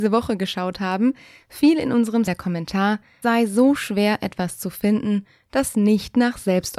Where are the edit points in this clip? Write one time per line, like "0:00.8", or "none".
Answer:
0:02.3
0:03.2